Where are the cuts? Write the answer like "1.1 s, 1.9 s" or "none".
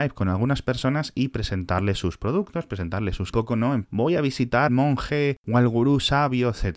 3.3 s, 3.8 s, 4.7 s